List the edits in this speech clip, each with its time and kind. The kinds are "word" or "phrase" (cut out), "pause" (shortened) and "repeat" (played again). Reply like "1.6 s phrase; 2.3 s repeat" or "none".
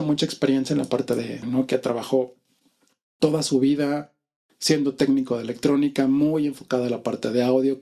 1.4 s phrase